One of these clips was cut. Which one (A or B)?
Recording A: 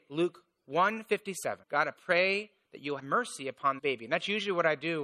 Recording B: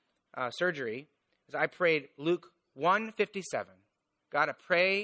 A